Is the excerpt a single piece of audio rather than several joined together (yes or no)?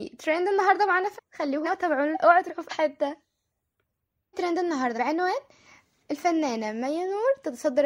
no